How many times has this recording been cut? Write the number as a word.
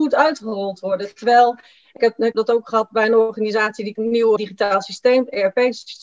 four